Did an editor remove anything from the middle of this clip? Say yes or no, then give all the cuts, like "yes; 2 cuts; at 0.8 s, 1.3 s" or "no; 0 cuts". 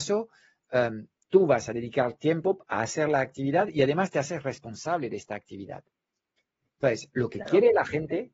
no; 0 cuts